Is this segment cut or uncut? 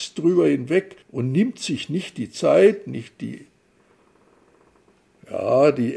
cut